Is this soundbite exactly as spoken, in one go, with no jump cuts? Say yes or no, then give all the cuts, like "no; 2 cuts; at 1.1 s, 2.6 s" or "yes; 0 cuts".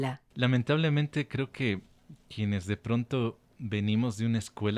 yes; 0 cuts